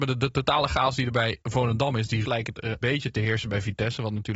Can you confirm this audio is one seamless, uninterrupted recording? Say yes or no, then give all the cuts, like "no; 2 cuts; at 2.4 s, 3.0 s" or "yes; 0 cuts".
no; 3 cuts; at 1.4 s, 2.2 s, 2.8 s